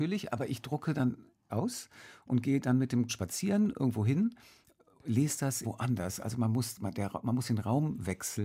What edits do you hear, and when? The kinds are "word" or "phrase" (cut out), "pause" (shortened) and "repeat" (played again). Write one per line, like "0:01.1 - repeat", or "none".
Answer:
0:01.5 - word
0:03.1 - phrase
0:05.6 - word